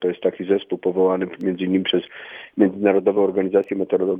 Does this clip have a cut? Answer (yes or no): no